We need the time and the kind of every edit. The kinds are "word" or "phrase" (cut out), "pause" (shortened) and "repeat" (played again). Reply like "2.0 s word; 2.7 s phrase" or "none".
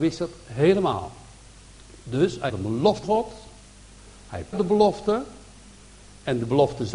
2.5 s word; 3.0 s word; 4.5 s phrase